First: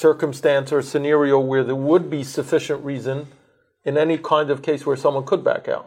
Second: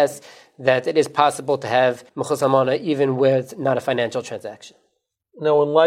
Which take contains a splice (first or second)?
second